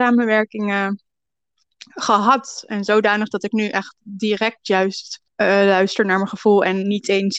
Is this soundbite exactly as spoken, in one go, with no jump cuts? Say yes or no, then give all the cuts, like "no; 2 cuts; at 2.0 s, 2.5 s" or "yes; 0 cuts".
no; 1 cut; at 5.3 s